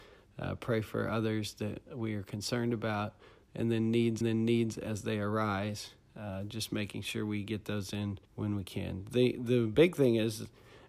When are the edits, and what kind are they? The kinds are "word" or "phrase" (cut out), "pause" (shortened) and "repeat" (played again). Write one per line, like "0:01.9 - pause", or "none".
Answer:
0:04.2 - repeat
0:08.2 - pause